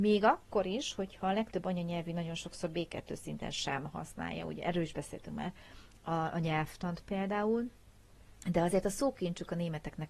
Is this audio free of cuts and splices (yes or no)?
yes